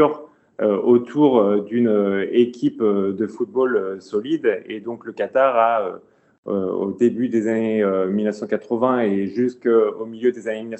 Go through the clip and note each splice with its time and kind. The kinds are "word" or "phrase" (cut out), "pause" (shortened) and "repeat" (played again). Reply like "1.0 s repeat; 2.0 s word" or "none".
none